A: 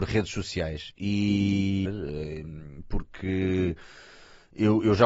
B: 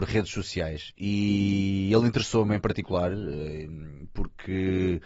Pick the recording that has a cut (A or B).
A